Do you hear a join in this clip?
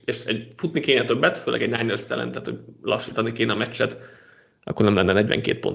no; 0 cuts

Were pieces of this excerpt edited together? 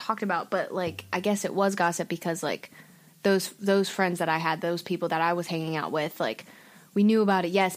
no; 0 cuts

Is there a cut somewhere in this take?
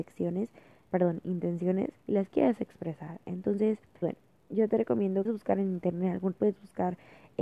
yes; 4 cuts; at 2.0 s, 4.0 s, 5.2 s, 6.3 s

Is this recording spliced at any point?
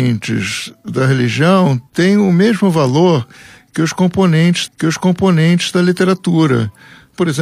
yes; 2 cuts; at 1.9 s, 4.7 s

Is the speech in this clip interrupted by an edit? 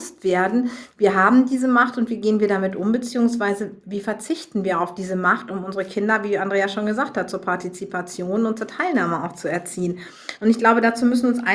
no; 0 cuts

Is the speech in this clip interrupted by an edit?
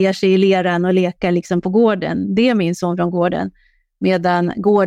no; 0 cuts

